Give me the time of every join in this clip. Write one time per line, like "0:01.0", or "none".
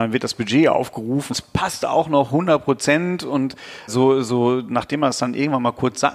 0:01.3
0:03.9

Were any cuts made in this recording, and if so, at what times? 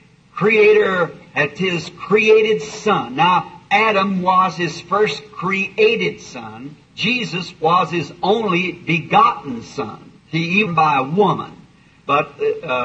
0:01.6
0:06.8
0:10.2
0:10.7

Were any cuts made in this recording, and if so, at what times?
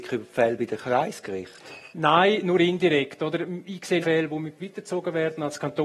0:01.9
0:04.0
0:04.6

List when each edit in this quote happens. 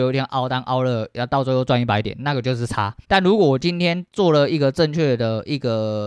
0:03.0

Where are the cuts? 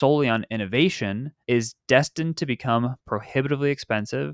0:01.4

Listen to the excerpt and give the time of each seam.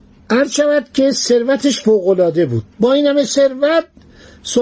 0:02.7

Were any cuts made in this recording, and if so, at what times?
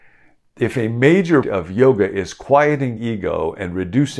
0:01.4
0:03.0

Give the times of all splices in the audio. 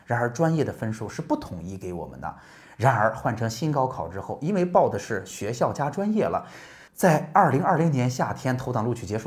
0:06.9

